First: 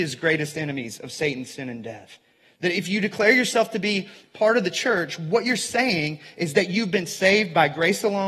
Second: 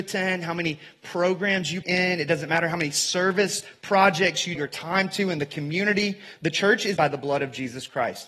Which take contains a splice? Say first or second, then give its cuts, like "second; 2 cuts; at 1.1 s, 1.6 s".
second; 3 cuts; at 1.8 s, 4.5 s, 7.0 s